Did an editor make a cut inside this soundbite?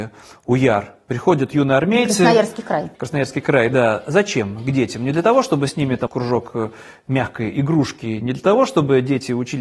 yes; 1 cut; at 6.1 s

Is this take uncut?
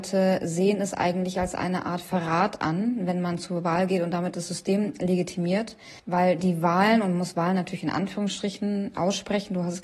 no; 2 cuts; at 6.0 s, 8.9 s

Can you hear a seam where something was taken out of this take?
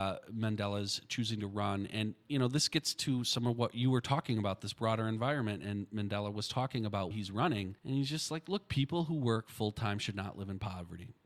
yes; 2 cuts; at 7.1 s, 7.8 s

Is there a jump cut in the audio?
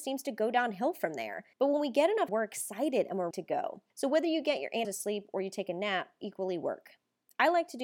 yes; 6 cuts; at 1.5 s, 2.3 s, 3.3 s, 3.9 s, 4.8 s, 6.2 s

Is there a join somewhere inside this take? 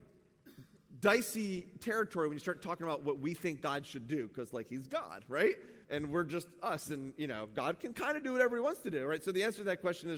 yes; 1 cut; at 5.8 s

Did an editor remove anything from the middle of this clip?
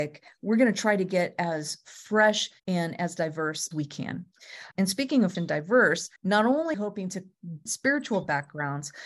yes; 7 cuts; at 2.6 s, 3.7 s, 4.7 s, 5.3 s, 6.2 s, 6.7 s, 7.7 s

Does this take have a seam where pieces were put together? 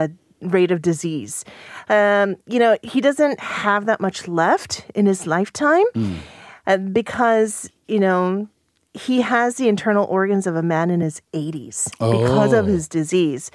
no; 0 cuts

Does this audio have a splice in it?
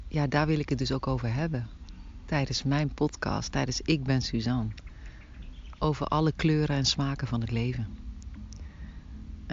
no; 0 cuts

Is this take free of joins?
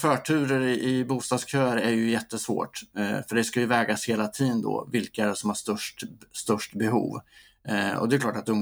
yes; 0 cuts

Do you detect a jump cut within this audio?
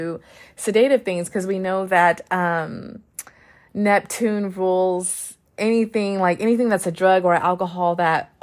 no; 0 cuts

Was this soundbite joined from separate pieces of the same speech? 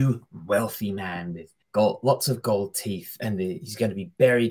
yes; 1 cut; at 1.6 s

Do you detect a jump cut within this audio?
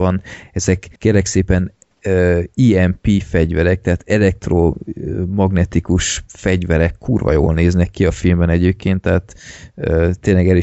yes; 2 cuts; at 1.0 s, 6.3 s

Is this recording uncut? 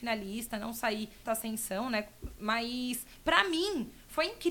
no; 1 cut; at 1.2 s

